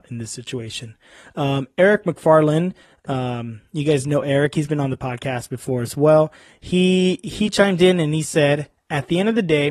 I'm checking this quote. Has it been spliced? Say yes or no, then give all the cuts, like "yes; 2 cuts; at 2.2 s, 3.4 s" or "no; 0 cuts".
no; 0 cuts